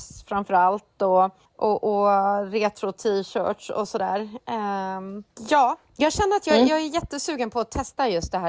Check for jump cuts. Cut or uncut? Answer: cut